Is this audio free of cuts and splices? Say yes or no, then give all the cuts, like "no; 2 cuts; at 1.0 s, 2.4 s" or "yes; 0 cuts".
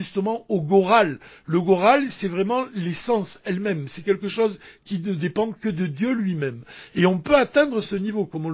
yes; 0 cuts